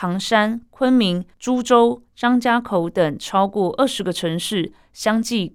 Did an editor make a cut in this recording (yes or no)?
yes